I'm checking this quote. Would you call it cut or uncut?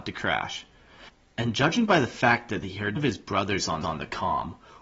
cut